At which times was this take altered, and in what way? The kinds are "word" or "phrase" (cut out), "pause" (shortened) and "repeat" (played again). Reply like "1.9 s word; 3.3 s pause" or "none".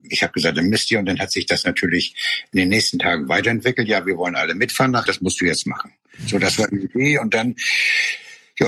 5.1 s word